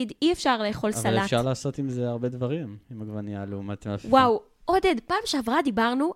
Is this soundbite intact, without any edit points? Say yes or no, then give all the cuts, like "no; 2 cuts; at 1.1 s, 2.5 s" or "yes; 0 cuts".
yes; 0 cuts